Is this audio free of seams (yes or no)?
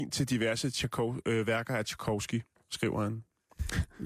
yes